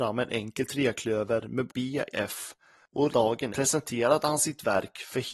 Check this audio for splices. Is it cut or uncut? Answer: cut